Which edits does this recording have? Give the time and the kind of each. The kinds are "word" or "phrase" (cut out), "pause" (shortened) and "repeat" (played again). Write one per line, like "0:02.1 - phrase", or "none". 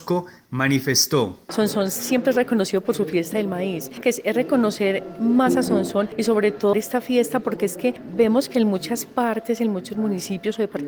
0:04.0 - word
0:06.7 - word